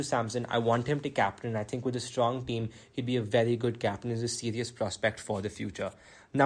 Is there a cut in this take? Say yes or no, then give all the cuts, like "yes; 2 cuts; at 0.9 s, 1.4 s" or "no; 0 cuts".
no; 0 cuts